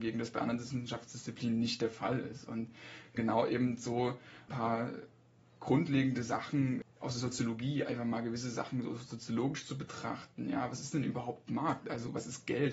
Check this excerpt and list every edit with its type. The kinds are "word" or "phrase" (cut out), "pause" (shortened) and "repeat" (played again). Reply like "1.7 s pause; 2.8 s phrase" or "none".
none

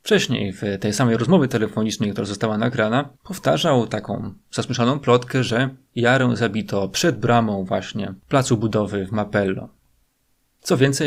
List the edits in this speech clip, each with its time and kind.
3.1 s pause; 8.2 s pause

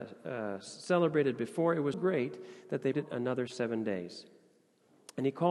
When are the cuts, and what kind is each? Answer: 1.9 s word; 2.9 s word

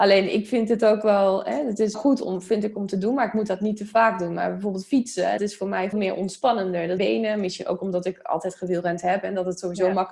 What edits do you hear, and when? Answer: 1.9 s word; 5.4 s word; 5.9 s word; 7.0 s phrase

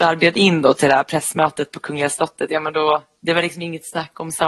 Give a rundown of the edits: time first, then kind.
none

